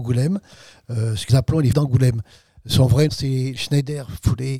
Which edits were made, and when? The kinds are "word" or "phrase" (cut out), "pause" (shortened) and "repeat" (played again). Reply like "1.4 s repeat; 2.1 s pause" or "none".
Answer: 1.3 s word; 1.7 s word; 3.1 s word; 3.6 s word